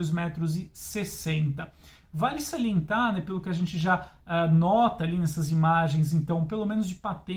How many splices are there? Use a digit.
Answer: 0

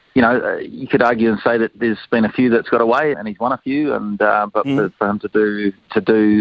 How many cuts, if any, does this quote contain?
2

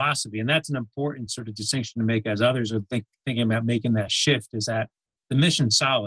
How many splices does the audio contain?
0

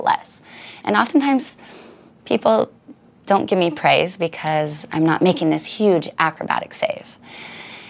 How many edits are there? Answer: 0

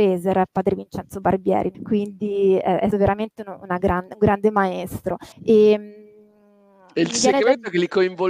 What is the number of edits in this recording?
3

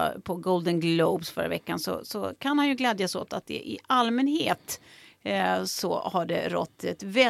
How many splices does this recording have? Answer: 0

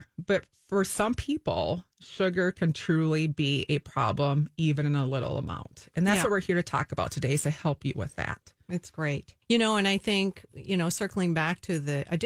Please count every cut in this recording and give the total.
1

